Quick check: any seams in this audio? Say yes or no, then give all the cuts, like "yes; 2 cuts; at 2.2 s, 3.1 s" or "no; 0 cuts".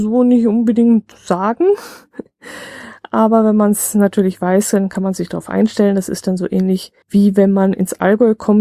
yes; 2 cuts; at 1.1 s, 7.0 s